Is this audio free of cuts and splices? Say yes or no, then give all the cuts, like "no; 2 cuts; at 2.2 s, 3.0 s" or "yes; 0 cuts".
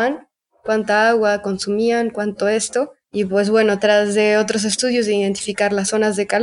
no; 1 cut; at 3.0 s